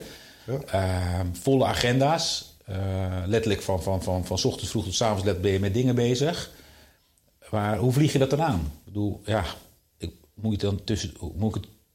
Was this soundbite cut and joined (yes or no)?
no